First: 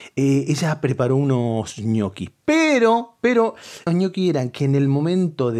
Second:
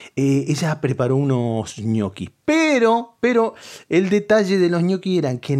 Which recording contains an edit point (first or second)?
first